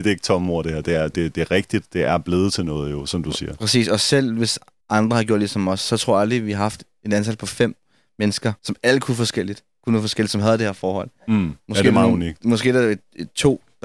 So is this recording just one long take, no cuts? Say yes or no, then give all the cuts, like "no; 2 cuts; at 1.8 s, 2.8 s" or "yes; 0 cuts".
no; 2 cuts; at 4.8 s, 8.6 s